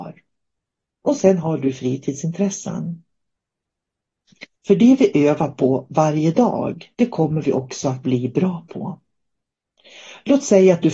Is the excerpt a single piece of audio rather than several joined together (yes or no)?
no